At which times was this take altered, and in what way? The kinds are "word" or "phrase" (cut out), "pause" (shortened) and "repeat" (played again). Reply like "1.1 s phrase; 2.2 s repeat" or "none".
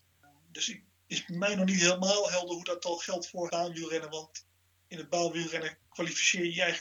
3.5 s word